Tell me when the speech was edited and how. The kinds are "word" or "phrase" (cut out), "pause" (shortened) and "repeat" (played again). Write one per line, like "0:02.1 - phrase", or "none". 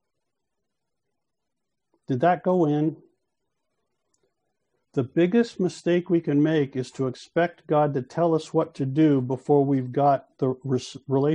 none